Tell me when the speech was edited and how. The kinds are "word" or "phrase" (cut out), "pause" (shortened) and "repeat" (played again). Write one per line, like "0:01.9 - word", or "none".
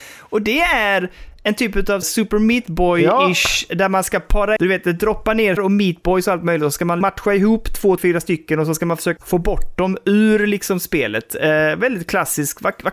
0:02.0 - word
0:04.6 - word
0:05.6 - word
0:07.0 - word
0:08.0 - word
0:09.2 - word